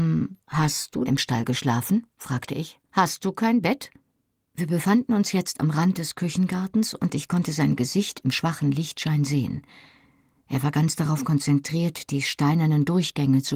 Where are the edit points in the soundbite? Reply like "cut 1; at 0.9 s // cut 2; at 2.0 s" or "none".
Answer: cut 1; at 1.1 s